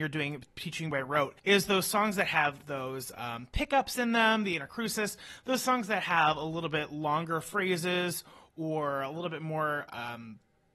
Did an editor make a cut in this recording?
yes; 1 cut; at 1.4 s

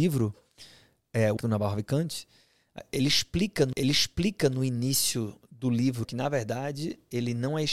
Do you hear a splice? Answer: yes; 3 cuts; at 1.4 s, 3.7 s, 6.0 s

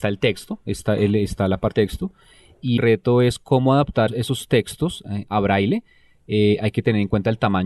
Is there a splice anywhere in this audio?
yes; 3 cuts; at 1.7 s, 2.8 s, 4.1 s

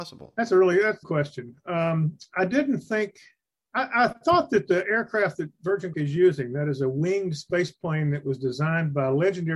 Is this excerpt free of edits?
no; 3 cuts; at 1.0 s, 3.5 s, 5.9 s

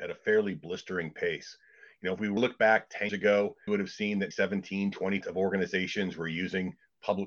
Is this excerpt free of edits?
no; 5 cuts; at 2.4 s, 3.1 s, 3.7 s, 4.3 s, 5.2 s

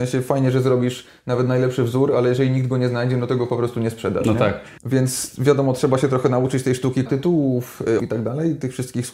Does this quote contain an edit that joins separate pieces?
yes; 3 cuts; at 4.8 s, 7.1 s, 8.0 s

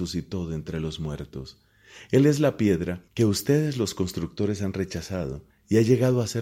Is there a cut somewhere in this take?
yes; 2 cuts; at 3.1 s, 5.5 s

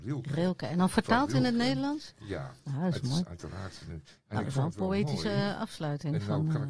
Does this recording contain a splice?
no; 0 cuts

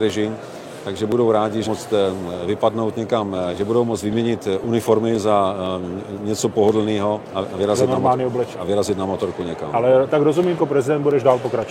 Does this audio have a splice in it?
yes; 5 cuts; at 1.6 s, 3.5 s, 7.3 s, 8.5 s, 10.6 s

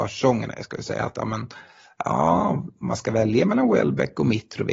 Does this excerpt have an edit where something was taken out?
no; 0 cuts

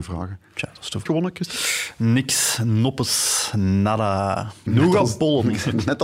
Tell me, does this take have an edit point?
yes; 2 cuts; at 1.1 s, 4.7 s

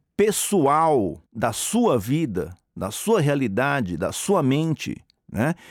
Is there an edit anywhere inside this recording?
yes; 1 cut; at 1.3 s

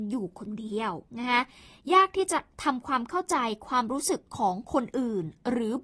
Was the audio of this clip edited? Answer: yes; 1 cut; at 1.1 s

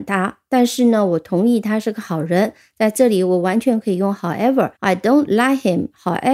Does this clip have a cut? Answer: yes; 1 cut; at 4.8 s

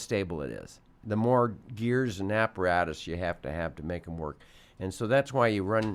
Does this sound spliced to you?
no; 0 cuts

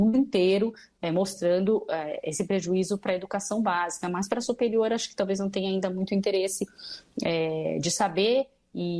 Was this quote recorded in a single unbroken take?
yes; 0 cuts

